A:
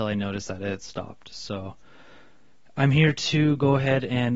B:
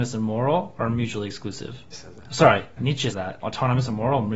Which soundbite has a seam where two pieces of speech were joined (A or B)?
B